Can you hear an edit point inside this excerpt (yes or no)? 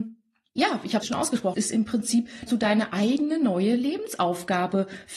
yes